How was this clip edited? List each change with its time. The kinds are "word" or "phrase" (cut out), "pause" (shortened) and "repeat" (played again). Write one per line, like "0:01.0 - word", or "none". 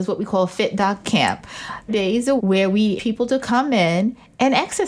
0:01.0 - word
0:01.9 - word
0:02.4 - word
0:03.0 - word